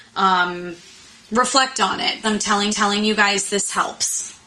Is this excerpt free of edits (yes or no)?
no